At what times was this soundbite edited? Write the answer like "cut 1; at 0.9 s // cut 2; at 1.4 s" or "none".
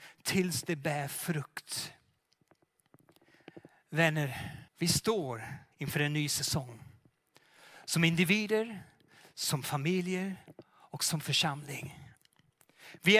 cut 1; at 4.7 s // cut 2; at 5.7 s